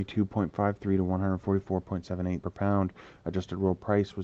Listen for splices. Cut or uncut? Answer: cut